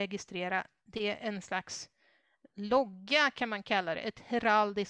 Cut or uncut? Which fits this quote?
uncut